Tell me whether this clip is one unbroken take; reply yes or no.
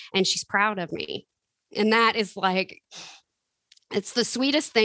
yes